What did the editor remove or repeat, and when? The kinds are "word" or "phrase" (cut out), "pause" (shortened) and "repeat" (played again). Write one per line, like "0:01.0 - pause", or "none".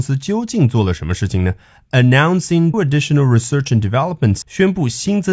0:02.7 - word
0:04.4 - word